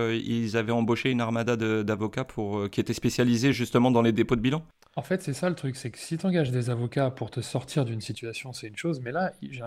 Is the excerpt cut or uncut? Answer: uncut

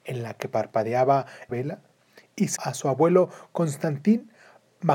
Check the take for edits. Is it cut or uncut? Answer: cut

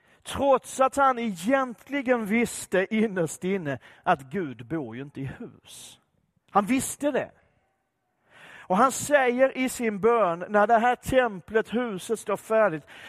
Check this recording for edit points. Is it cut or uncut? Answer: uncut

